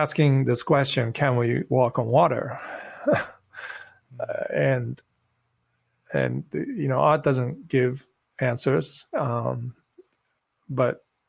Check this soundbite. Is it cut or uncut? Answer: uncut